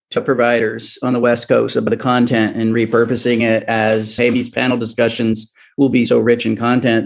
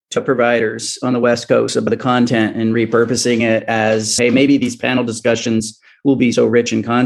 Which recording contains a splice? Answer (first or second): first